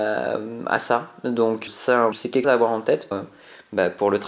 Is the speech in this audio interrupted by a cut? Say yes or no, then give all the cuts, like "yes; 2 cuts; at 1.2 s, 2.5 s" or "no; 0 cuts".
yes; 4 cuts; at 1.7 s, 2.1 s, 2.4 s, 3.1 s